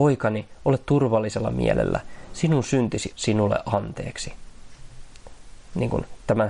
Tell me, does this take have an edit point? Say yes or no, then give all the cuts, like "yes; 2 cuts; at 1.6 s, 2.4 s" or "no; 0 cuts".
yes; 1 cut; at 3.1 s